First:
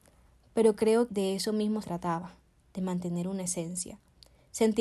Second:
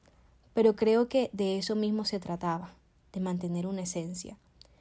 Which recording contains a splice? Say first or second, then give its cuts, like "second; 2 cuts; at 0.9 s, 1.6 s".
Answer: first; 2 cuts; at 1.1 s, 1.8 s